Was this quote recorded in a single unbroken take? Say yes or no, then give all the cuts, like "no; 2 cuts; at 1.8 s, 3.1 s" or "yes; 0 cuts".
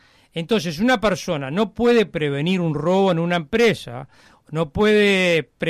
yes; 0 cuts